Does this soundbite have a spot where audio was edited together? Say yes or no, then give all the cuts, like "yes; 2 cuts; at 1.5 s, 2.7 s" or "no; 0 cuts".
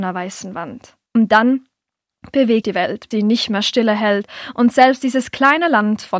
yes; 3 cuts; at 1.1 s, 2.6 s, 3.1 s